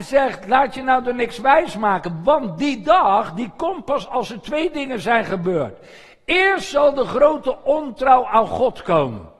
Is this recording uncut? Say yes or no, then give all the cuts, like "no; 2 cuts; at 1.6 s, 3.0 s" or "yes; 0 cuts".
yes; 0 cuts